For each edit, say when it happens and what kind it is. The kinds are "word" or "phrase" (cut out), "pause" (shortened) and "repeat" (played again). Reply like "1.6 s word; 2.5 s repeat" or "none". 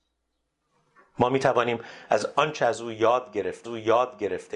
3.6 s repeat